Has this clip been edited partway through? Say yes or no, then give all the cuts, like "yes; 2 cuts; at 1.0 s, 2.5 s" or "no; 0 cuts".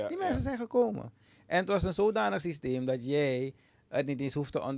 no; 0 cuts